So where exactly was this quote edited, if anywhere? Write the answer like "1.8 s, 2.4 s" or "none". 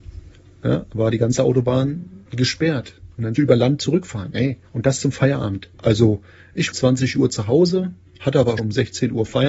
2.3 s, 3.3 s, 4.6 s, 5.7 s, 6.7 s, 8.6 s